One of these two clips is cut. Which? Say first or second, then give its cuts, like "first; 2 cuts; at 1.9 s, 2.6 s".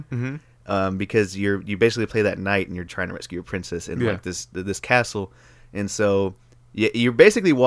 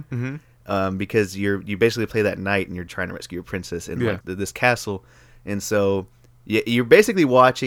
second; 1 cut; at 4.2 s